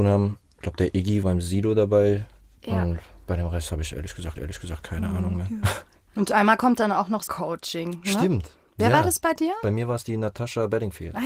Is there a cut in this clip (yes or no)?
yes